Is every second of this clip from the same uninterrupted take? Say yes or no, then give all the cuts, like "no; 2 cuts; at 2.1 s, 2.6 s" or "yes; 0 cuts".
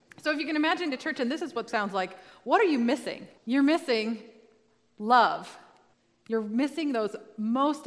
no; 3 cuts; at 0.9 s, 1.7 s, 3.4 s